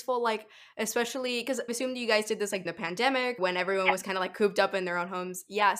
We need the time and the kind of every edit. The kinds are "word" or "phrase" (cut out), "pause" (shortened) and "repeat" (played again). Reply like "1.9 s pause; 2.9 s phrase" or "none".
1.7 s word; 2.7 s word; 3.4 s word